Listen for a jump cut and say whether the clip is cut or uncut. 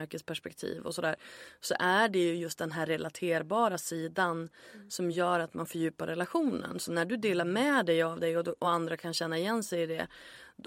uncut